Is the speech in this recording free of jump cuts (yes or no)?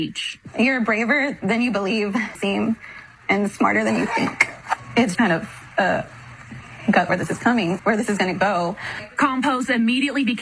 no